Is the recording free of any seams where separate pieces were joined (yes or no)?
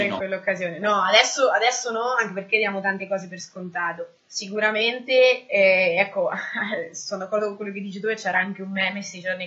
no